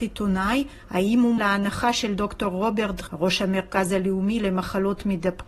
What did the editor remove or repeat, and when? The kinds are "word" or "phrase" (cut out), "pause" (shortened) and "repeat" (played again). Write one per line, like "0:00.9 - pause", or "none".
0:01.4 - word
0:03.1 - word

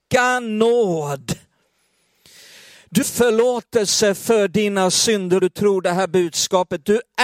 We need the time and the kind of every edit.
0:03.0 - word
0:05.4 - word

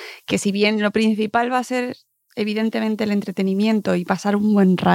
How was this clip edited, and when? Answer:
none

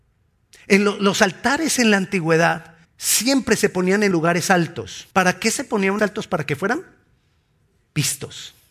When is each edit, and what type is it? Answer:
0:02.8 - pause
0:04.1 - word
0:05.1 - pause
0:06.0 - phrase

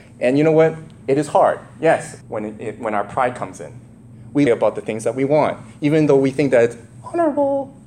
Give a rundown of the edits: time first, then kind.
0:02.2 - pause
0:04.5 - phrase

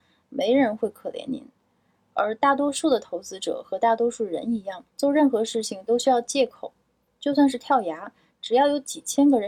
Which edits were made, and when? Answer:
0:04.9 - pause

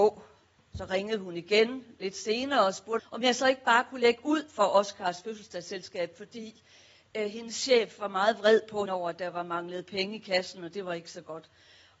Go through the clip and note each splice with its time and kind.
0:03.0 - word
0:08.9 - word

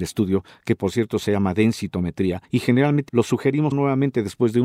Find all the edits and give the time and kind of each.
0:02.4 - pause
0:03.1 - word
0:03.7 - word

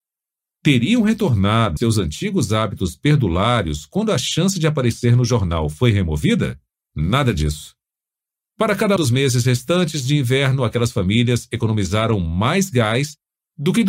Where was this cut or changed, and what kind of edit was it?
0:01.8 - word
0:06.7 - pause
0:09.0 - word

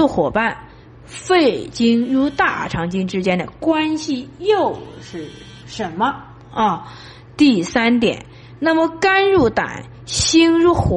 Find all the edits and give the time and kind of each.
none

